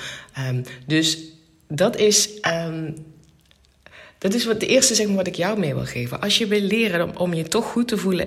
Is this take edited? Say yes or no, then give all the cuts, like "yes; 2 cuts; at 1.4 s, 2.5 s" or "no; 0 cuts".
no; 0 cuts